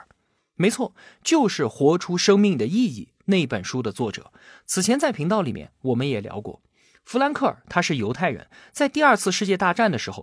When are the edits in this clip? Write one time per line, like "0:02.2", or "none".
none